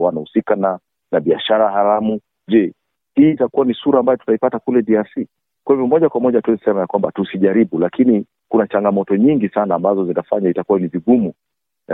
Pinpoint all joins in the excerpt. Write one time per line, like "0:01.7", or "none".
none